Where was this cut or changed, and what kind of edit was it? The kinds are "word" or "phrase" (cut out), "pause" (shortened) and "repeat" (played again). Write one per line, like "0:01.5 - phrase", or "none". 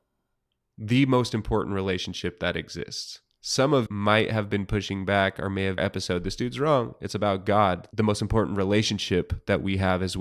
0:03.9 - word
0:05.8 - phrase